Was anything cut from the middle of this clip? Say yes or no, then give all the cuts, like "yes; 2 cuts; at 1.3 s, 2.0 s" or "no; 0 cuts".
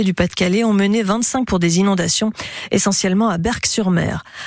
yes; 1 cut; at 1.5 s